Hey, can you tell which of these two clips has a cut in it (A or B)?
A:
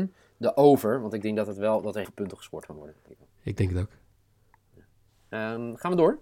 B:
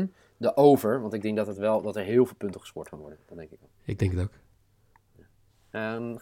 A